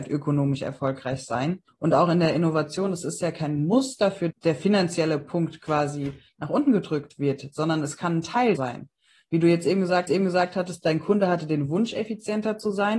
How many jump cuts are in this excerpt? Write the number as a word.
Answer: four